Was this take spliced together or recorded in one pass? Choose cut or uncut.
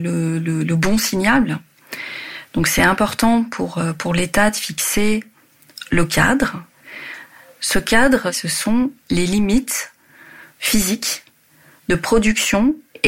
uncut